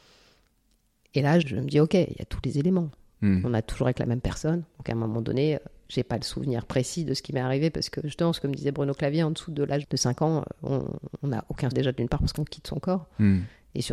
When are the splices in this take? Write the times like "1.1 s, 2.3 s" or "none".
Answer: 1.4 s, 9.8 s, 11.7 s

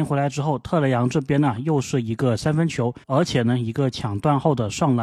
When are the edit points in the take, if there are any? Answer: 3.0 s

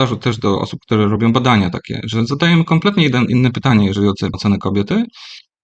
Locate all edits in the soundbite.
4.3 s

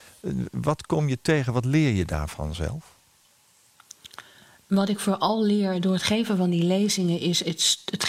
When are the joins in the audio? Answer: none

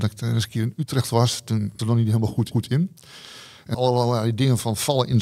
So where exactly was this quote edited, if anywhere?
1.8 s, 2.5 s, 3.7 s

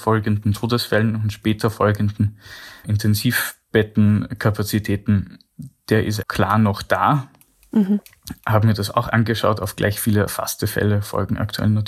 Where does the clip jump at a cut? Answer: 2.8 s, 6.2 s

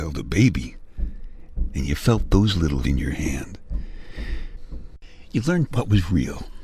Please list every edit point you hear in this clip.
2.8 s, 5.7 s

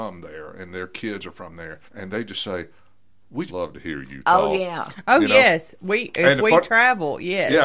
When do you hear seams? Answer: 1.9 s, 3.5 s

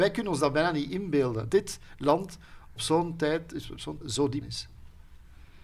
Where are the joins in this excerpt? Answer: 1.5 s, 2.8 s, 4.0 s, 4.4 s

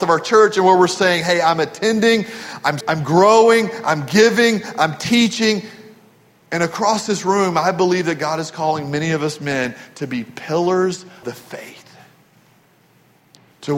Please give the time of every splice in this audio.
2.8 s, 11.2 s

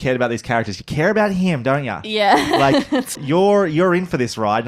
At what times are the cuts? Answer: 3.1 s

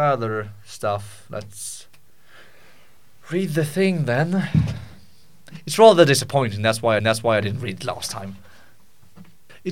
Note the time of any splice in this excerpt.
7.0 s

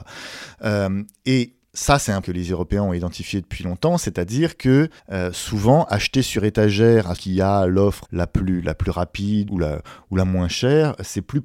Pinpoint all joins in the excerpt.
2.2 s, 5.0 s, 7.2 s, 8.0 s, 9.5 s

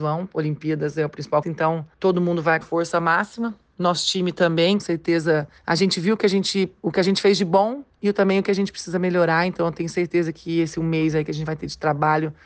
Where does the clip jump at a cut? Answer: 1.4 s, 1.9 s, 2.6 s, 4.8 s, 5.6 s, 6.8 s

